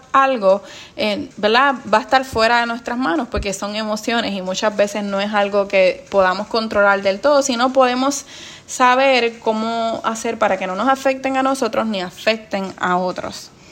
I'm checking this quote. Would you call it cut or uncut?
cut